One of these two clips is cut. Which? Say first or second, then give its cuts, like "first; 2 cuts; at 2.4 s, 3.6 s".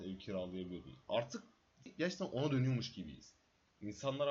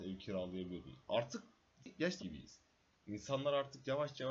second; 1 cut; at 2.2 s